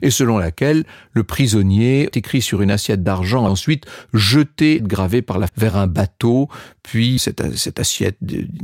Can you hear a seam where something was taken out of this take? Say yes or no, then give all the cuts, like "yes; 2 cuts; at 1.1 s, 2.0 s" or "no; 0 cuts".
yes; 5 cuts; at 2.1 s, 3.5 s, 4.8 s, 5.5 s, 7.2 s